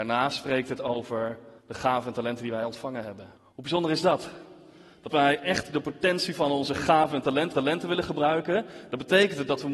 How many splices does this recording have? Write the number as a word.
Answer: four